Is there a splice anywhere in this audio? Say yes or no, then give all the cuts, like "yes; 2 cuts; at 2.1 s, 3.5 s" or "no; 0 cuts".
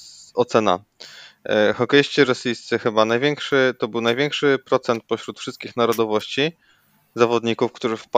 no; 0 cuts